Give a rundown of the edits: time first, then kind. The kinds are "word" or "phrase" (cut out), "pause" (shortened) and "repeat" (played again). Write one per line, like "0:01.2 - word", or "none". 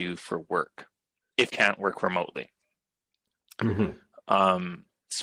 0:01.5 - word